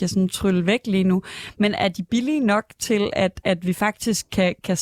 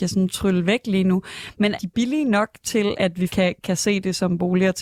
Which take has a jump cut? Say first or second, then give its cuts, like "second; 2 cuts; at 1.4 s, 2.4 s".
second; 3 cuts; at 1.7 s, 2.9 s, 3.3 s